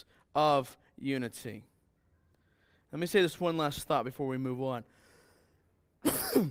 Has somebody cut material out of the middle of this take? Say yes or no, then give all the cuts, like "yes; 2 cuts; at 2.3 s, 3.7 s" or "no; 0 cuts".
no; 0 cuts